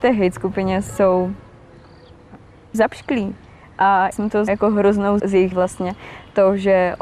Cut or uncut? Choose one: cut